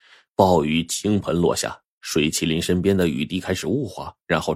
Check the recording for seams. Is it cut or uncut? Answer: uncut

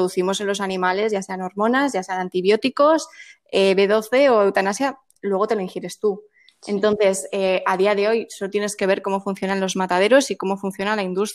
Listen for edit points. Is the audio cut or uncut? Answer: uncut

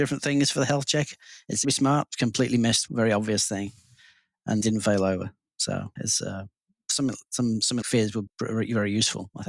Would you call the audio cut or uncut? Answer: cut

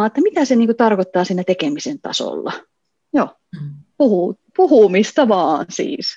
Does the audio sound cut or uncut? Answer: cut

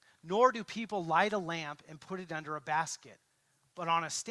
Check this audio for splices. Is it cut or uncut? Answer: uncut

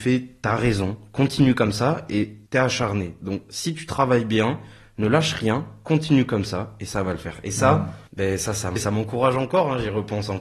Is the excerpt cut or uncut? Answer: cut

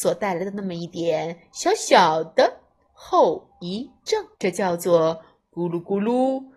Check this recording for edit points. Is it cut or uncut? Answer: cut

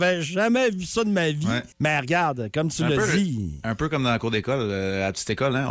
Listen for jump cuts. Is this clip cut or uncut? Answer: cut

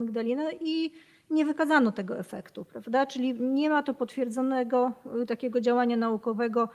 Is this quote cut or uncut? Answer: uncut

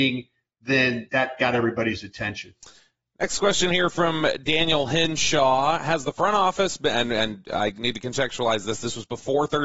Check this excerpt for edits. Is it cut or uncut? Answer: uncut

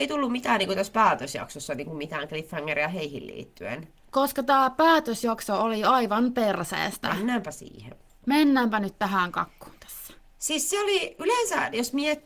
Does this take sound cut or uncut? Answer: uncut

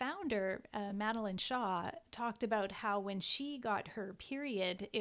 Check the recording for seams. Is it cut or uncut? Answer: uncut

